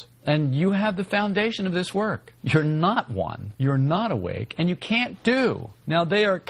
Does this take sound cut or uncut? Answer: uncut